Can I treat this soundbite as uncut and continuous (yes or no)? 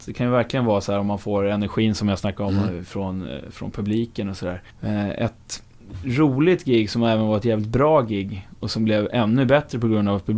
no